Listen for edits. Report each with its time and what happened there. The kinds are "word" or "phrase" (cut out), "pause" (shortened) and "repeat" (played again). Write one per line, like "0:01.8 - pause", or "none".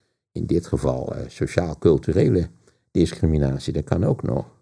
none